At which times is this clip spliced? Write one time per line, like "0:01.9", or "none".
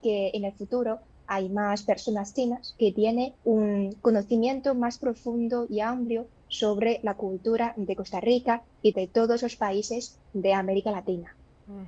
0:03.4
0:08.9